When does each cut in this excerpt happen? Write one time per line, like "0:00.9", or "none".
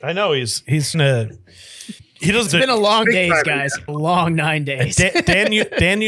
0:00.9
0:02.0
0:02.5
0:03.0
0:03.9